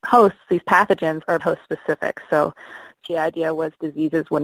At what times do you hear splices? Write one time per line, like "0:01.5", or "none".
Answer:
0:01.4
0:03.1

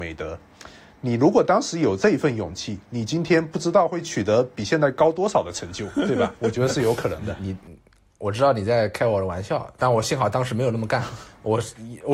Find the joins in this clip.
none

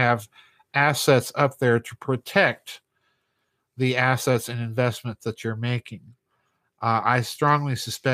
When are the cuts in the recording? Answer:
none

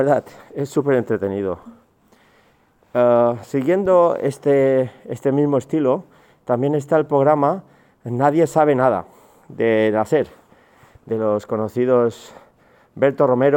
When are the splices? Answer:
none

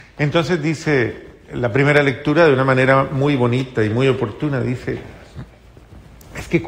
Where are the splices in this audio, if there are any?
none

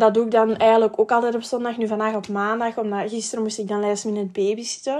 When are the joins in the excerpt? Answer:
none

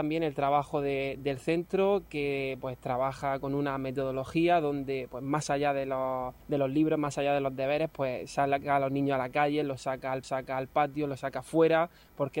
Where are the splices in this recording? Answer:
0:06.4
0:10.2

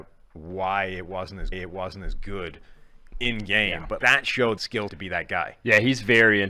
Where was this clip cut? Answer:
0:01.5
0:04.0
0:04.6
0:04.9

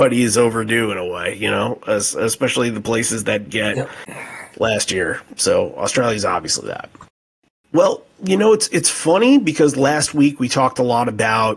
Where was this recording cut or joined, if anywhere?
0:03.5

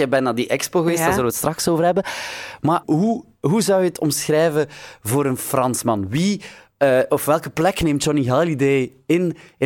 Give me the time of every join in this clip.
0:02.8

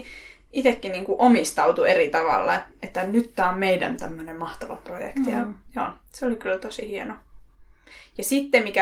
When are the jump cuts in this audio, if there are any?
none

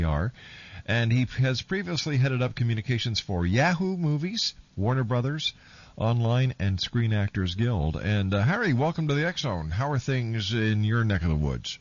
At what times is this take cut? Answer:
0:04.7

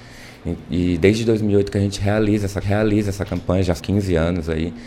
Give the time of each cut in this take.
0:02.6
0:03.8

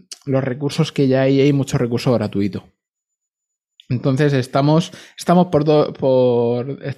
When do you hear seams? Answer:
none

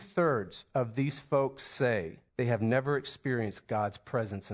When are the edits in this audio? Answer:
0:02.3

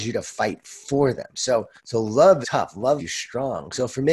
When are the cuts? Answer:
0:01.8
0:02.4
0:03.0

